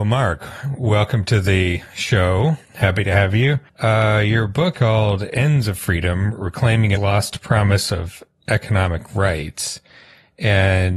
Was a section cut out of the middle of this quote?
yes; 4 cuts; at 2.6 s, 3.7 s, 4.7 s, 7.0 s

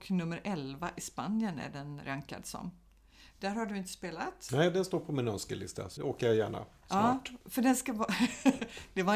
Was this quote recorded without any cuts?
no; 1 cut; at 6.0 s

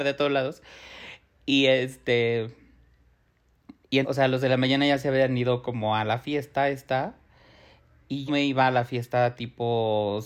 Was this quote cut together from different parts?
yes; 2 cuts; at 4.0 s, 8.3 s

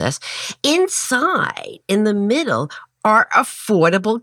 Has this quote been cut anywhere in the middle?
no; 0 cuts

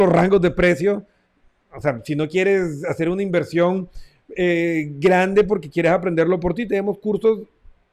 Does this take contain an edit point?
no; 0 cuts

